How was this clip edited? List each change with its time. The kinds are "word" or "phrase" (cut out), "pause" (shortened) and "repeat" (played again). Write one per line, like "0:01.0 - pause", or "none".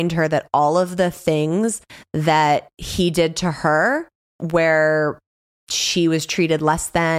none